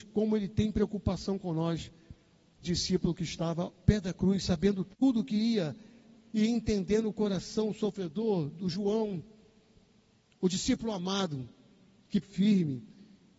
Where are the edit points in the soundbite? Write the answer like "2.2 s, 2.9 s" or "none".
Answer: 2.6 s, 3.8 s, 8.7 s, 12.2 s